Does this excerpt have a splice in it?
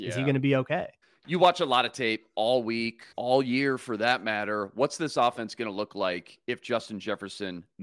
yes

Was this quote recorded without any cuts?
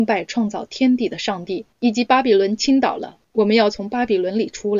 no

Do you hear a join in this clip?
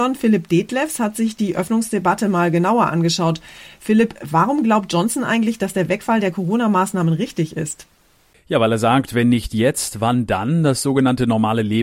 no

